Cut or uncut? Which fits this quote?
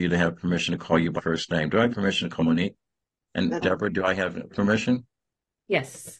cut